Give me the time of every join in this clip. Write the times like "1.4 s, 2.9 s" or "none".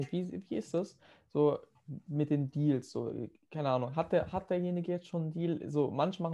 none